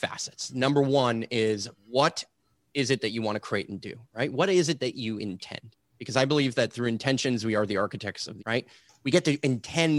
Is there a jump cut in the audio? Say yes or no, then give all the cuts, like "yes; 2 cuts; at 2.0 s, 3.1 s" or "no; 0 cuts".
yes; 2 cuts; at 1.8 s, 8.4 s